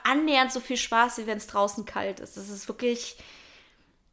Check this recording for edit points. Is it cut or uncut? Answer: uncut